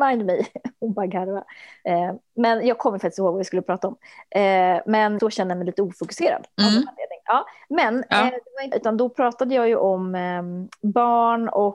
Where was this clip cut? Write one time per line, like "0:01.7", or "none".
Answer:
0:05.2
0:06.5
0:08.7